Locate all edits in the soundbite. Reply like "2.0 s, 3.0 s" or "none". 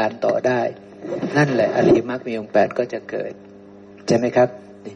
none